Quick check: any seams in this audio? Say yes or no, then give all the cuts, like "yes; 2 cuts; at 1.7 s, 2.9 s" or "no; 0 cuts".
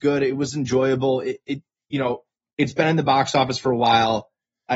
no; 0 cuts